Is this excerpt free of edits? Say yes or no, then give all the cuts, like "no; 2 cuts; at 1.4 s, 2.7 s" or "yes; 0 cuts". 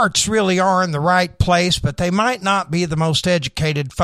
yes; 0 cuts